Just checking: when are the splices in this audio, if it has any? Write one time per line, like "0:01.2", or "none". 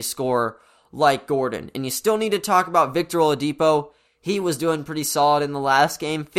none